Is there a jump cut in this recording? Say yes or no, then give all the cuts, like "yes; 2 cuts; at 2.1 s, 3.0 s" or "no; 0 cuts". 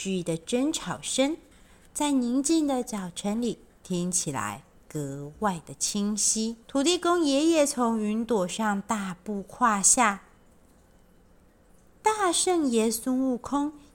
yes; 2 cuts; at 1.5 s, 6.6 s